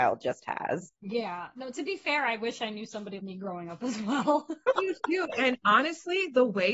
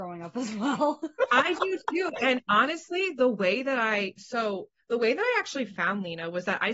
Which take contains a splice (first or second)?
first